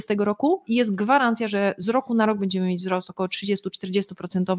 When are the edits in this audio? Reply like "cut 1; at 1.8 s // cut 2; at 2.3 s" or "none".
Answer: none